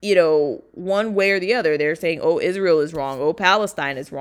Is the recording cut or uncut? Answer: uncut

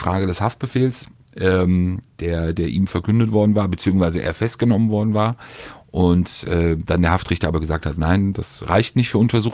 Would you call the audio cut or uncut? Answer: uncut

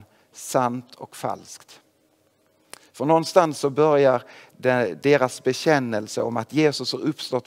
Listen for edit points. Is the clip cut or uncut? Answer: uncut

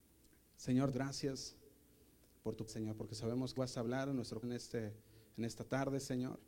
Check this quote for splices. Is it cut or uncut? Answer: cut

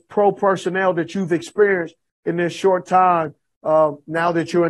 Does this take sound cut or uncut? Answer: uncut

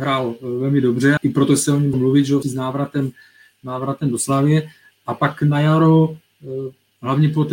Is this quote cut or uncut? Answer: cut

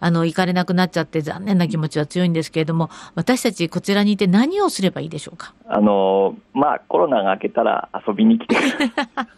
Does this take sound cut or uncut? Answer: cut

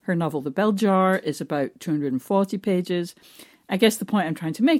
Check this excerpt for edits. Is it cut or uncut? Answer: uncut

